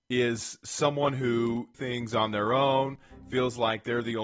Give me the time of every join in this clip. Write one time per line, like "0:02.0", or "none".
0:01.7